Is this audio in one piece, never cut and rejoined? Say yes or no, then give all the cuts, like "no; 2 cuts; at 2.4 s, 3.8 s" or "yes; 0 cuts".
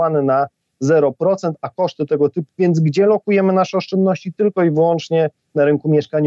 no; 1 cut; at 2.5 s